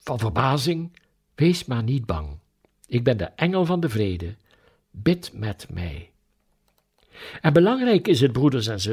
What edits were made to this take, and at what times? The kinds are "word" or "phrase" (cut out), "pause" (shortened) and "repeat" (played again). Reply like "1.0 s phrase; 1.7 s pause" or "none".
none